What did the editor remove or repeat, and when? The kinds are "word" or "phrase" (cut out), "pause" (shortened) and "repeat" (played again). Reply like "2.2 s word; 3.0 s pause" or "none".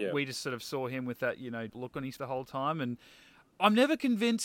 1.7 s word; 2.2 s word